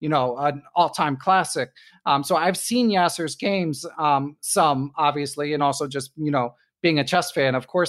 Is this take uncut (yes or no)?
yes